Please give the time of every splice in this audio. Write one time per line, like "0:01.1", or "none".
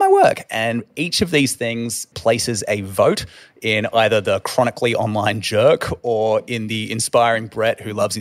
0:02.1